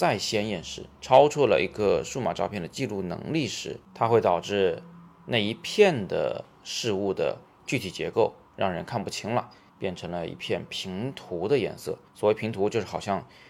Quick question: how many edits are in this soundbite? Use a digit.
4